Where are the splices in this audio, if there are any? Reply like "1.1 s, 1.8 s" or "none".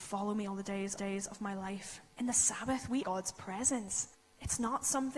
1.0 s, 2.1 s, 3.0 s, 4.1 s